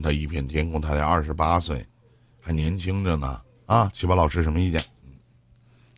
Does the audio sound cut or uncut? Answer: uncut